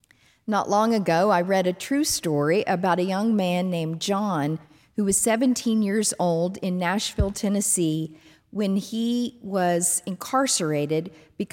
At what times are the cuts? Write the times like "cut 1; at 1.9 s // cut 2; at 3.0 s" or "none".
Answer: none